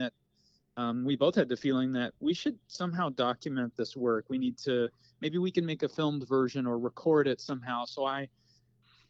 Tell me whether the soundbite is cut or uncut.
uncut